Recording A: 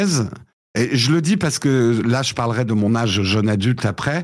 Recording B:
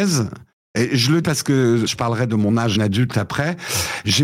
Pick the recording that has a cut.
B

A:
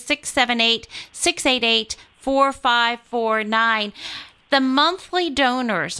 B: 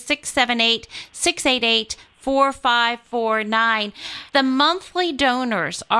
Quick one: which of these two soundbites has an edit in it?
B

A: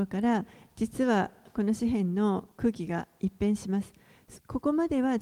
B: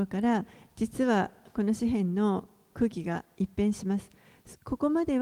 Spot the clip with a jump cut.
A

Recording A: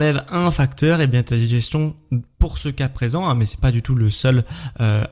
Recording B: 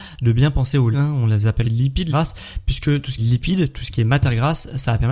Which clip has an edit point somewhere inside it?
B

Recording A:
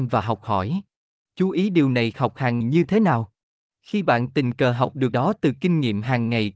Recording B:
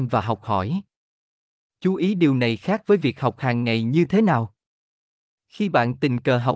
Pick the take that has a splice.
A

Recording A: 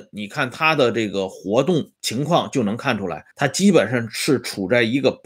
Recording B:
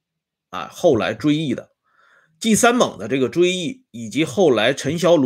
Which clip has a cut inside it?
A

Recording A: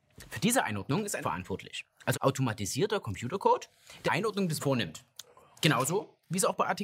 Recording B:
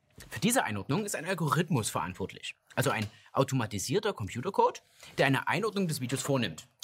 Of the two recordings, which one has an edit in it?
A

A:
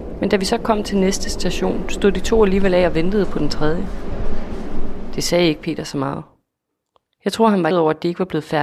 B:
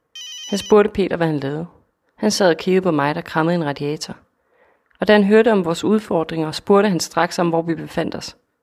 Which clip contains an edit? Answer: A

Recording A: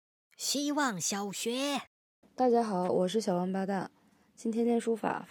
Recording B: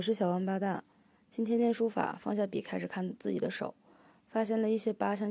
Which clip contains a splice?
A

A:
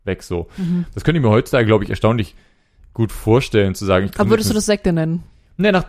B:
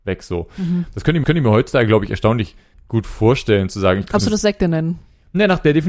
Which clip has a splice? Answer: B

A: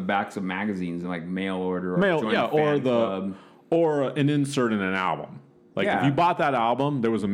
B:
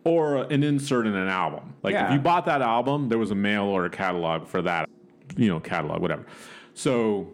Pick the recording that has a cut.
B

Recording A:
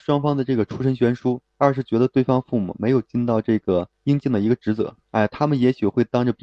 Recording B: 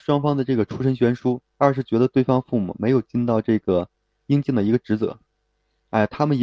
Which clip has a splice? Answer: A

